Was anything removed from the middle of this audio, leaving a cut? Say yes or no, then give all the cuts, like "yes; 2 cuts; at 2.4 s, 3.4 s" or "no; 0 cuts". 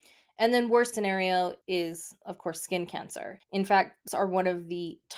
yes; 4 cuts; at 0.9 s, 1.6 s, 3.4 s, 4.1 s